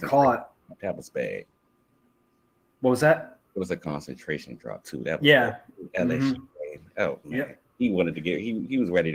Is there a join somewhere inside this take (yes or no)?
no